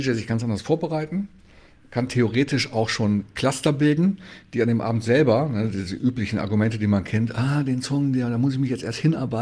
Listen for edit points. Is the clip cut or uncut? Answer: uncut